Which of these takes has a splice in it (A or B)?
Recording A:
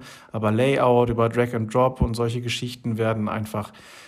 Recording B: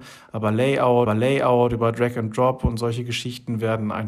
B